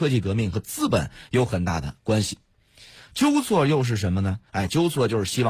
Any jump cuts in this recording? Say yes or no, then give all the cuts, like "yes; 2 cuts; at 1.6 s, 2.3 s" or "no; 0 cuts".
yes; 1 cut; at 4.5 s